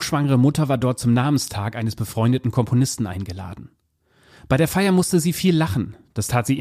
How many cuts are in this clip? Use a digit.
0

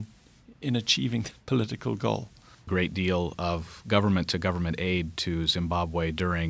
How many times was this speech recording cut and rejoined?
2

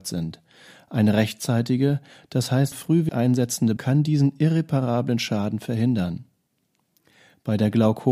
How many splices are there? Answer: 3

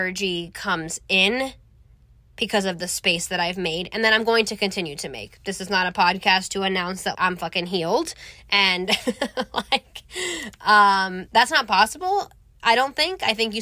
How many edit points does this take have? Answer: 2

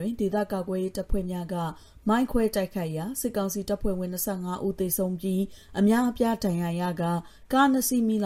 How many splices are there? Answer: 0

